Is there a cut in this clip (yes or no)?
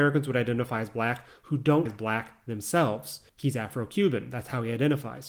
yes